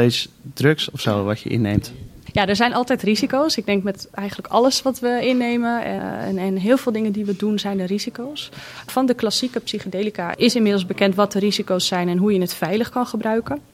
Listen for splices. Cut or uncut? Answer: cut